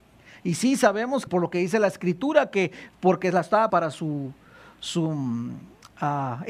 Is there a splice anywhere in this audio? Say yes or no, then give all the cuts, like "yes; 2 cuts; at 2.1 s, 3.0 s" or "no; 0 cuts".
yes; 2 cuts; at 1.3 s, 3.7 s